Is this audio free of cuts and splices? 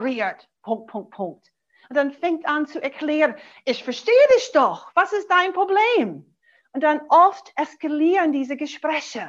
yes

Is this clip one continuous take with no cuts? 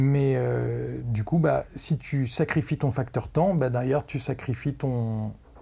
yes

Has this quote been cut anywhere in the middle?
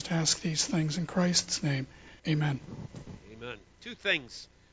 yes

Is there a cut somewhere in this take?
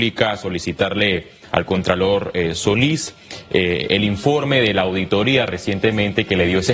no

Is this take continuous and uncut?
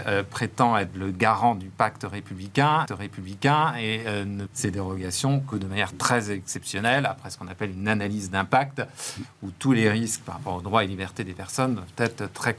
no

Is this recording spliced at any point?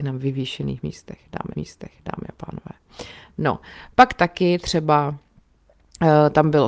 yes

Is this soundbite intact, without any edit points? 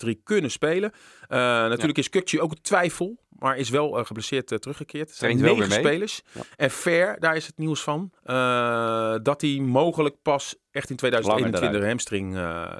no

